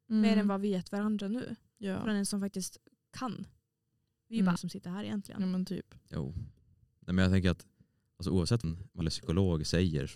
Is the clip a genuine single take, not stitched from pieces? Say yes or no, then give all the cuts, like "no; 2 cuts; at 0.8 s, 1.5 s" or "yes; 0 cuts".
no; 3 cuts; at 4.6 s, 8.6 s, 9.0 s